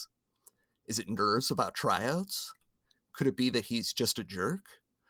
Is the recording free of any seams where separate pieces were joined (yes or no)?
yes